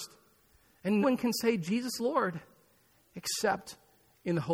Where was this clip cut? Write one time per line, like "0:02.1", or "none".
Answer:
0:01.0
0:02.0

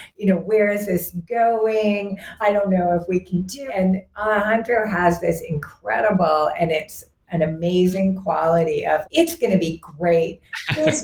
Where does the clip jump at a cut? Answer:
0:02.4
0:03.7
0:07.3
0:09.0

